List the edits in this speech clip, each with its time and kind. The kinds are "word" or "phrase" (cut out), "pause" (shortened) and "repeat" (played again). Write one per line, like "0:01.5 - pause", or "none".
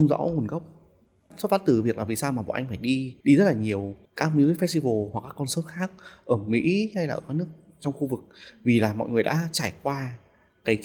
0:03.2 - pause
0:04.0 - pause